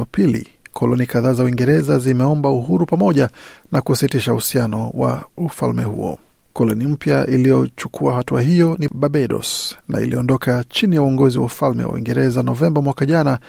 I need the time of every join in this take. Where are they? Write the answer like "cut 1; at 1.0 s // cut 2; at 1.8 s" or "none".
cut 1; at 9.8 s